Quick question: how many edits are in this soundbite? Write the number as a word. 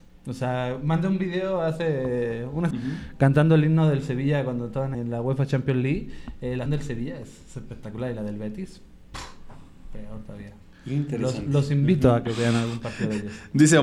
three